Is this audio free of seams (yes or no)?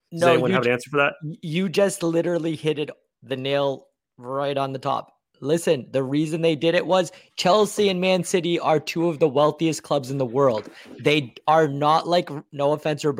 yes